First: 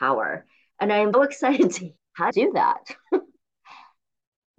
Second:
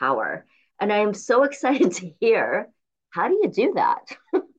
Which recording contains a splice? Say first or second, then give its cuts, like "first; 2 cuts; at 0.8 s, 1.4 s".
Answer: first; 3 cuts; at 1.1 s, 2.0 s, 2.3 s